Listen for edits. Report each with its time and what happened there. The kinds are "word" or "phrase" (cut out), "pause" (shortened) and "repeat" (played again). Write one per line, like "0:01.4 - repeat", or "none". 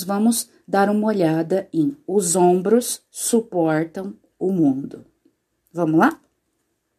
none